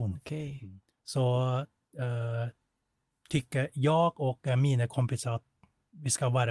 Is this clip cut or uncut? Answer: uncut